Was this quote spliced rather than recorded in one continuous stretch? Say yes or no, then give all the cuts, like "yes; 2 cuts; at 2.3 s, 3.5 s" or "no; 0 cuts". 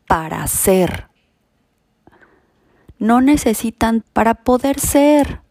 yes; 1 cut; at 4.0 s